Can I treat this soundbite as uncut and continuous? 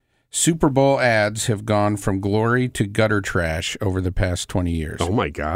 yes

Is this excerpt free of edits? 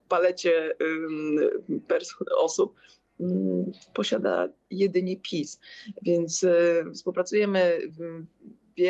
yes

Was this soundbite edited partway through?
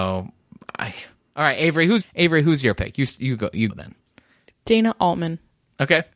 yes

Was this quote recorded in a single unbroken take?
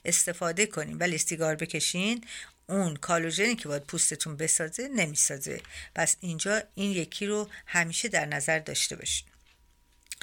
yes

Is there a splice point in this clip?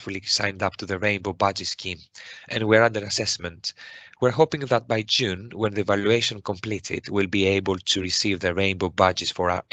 no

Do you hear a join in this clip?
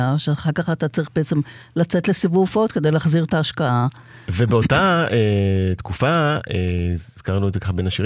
no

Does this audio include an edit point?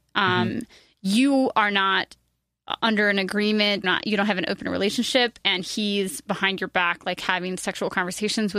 yes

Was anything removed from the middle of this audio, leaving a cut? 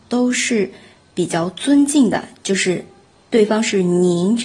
no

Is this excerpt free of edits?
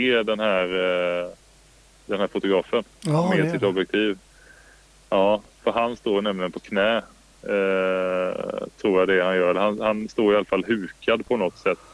yes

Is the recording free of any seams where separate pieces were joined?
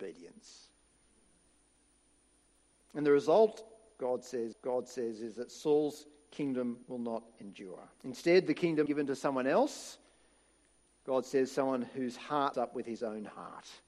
no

